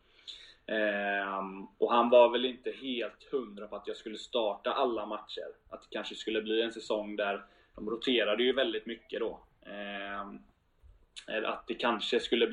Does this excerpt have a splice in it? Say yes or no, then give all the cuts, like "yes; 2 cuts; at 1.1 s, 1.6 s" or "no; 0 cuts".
no; 0 cuts